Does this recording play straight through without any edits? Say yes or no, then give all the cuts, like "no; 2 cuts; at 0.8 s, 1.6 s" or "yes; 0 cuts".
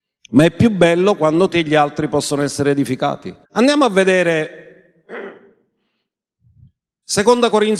no; 2 cuts; at 1.5 s, 3.4 s